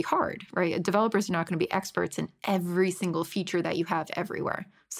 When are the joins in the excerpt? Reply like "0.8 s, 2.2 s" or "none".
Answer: none